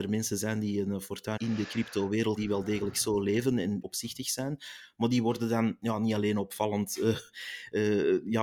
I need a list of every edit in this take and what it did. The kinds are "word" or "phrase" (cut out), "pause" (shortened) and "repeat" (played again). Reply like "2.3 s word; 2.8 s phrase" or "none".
1.4 s phrase; 2.4 s word; 3.8 s word

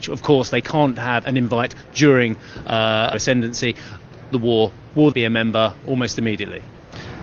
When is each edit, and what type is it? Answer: 1.2 s word; 3.1 s word; 4.3 s word; 5.1 s word

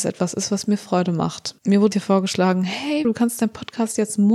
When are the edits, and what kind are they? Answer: 1.6 s pause; 1.9 s word; 3.0 s word

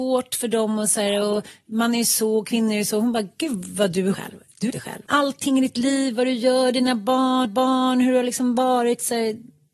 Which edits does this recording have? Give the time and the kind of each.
4.1 s phrase; 4.7 s phrase; 5.1 s pause; 7.4 s repeat

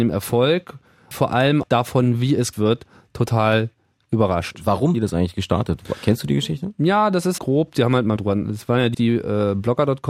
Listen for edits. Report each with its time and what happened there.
1.1 s word; 1.6 s word; 2.5 s word; 4.9 s word; 7.4 s word; 8.2 s word; 8.9 s word

